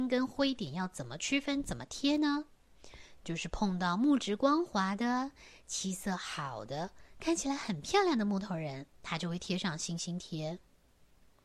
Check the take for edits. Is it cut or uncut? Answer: cut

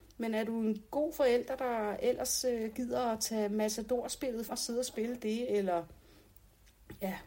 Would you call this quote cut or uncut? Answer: cut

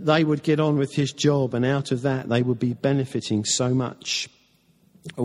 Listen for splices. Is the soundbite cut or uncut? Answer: uncut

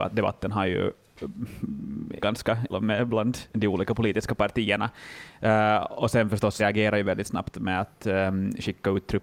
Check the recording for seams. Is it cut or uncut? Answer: cut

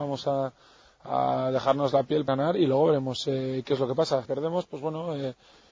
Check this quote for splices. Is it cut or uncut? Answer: cut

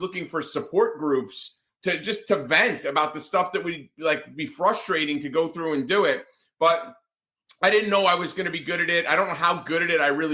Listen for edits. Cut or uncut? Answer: uncut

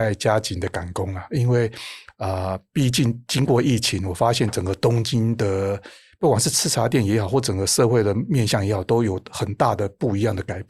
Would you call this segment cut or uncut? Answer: uncut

